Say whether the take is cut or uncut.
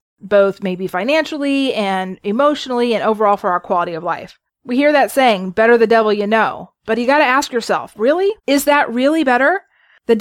cut